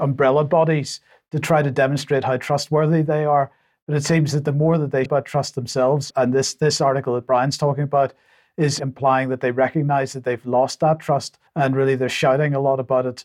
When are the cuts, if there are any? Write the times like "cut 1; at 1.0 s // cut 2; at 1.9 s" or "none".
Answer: cut 1; at 5.1 s // cut 2; at 6.1 s // cut 3; at 8.8 s // cut 4; at 11.5 s